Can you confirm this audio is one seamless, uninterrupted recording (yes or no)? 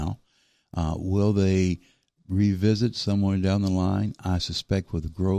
yes